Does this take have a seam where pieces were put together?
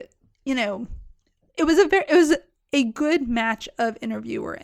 no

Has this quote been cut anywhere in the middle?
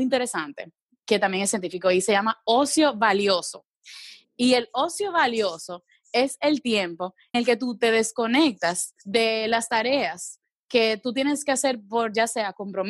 yes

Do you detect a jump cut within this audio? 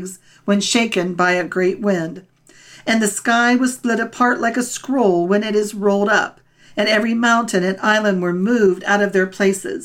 no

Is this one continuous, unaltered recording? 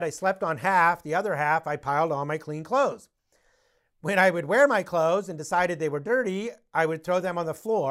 yes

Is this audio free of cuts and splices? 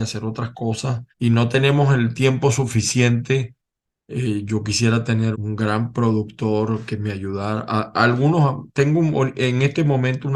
no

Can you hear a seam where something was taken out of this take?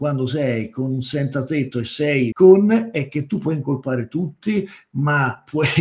yes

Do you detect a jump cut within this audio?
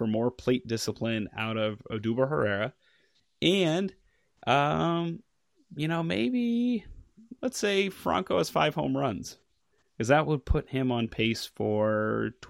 no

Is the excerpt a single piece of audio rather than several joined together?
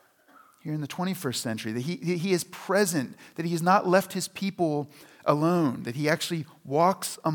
yes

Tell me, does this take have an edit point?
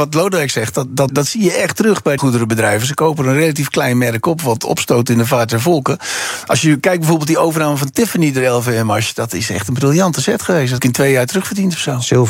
yes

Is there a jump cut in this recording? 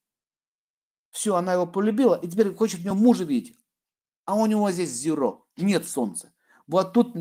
no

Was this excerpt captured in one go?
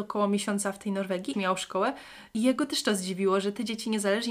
no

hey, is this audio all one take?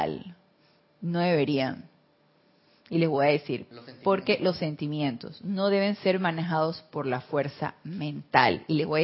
yes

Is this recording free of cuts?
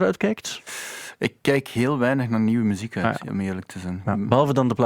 yes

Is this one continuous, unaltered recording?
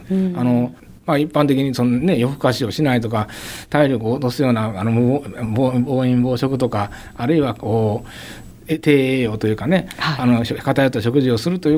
yes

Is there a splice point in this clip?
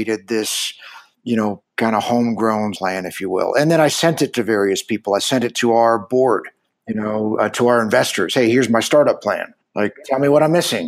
yes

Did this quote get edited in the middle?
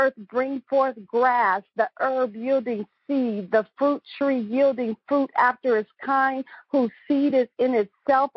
no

